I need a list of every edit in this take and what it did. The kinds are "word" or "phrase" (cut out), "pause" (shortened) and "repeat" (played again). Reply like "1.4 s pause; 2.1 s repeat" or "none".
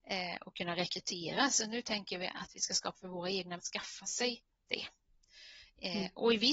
2.9 s word; 3.6 s word